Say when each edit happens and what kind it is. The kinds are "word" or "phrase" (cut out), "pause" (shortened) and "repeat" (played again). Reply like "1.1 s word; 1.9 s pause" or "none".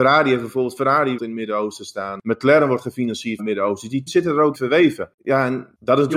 1.2 s word; 3.4 s word; 4.1 s word; 4.5 s word